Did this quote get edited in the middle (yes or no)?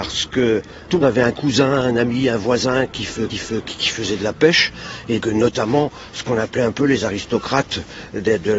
yes